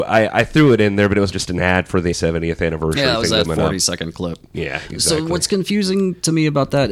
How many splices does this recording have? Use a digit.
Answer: 3